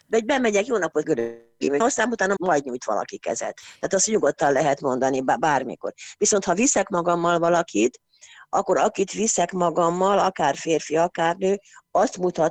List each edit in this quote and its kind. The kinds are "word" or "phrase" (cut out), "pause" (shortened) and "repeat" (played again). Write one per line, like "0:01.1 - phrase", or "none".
0:01.0 - word
0:01.8 - word
0:02.4 - word

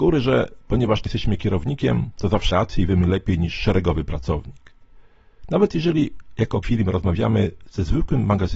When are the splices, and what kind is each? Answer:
0:01.1 - word
0:02.5 - word
0:06.6 - phrase

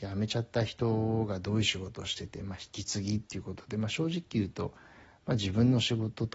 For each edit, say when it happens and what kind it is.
none

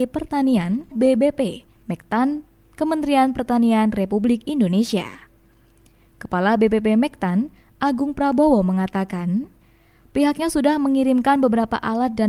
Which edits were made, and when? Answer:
0:00.9 - word

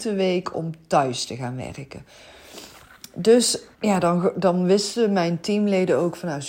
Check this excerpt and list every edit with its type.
0:03.7 - pause

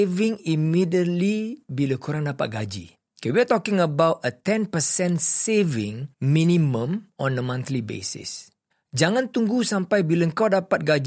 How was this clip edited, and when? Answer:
0:03.1 - pause
0:06.1 - pause
0:08.7 - pause

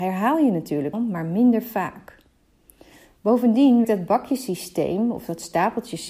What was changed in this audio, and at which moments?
0:00.9 - word
0:03.8 - word

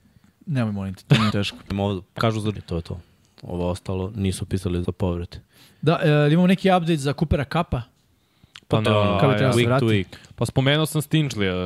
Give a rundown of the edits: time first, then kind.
0:01.3 - word
0:01.7 - word
0:02.5 - word
0:04.8 - word
0:08.9 - word

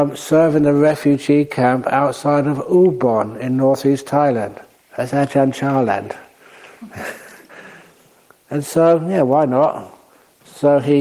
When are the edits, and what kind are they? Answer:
0:04.8 - pause

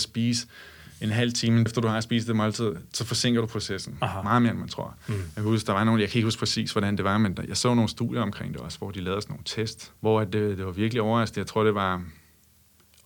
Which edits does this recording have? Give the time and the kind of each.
0:01.7 - word
0:10.0 - pause

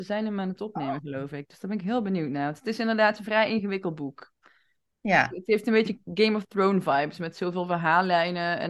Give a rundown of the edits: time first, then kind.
none

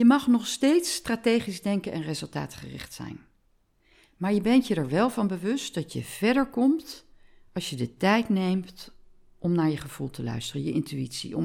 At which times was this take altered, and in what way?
none

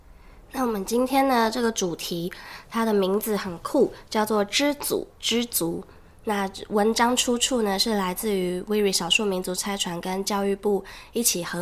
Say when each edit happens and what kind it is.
none

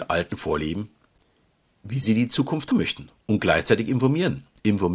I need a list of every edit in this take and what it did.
0:02.7 - word

